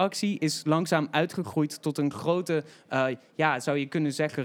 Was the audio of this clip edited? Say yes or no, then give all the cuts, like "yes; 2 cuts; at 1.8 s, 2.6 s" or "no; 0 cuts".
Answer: no; 0 cuts